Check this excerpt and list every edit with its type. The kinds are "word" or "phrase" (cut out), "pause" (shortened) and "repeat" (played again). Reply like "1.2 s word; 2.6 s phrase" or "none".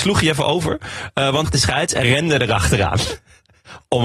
1.4 s phrase; 2.0 s word